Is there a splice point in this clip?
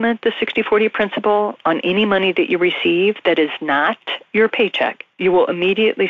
no; 0 cuts

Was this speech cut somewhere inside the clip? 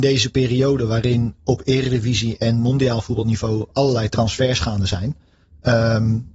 no; 0 cuts

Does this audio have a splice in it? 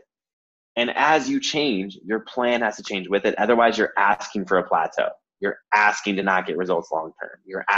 no; 0 cuts

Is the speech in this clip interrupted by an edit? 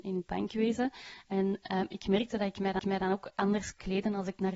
yes; 1 cut; at 2.8 s

